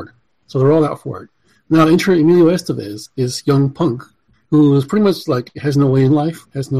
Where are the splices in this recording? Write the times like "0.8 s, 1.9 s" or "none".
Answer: none